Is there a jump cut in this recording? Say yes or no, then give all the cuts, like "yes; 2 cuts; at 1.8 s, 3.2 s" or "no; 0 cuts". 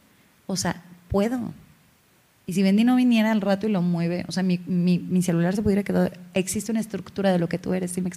no; 0 cuts